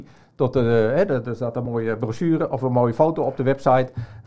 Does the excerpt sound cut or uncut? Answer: uncut